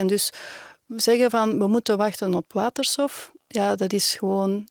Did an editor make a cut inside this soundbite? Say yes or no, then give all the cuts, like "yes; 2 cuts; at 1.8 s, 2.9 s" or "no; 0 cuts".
no; 0 cuts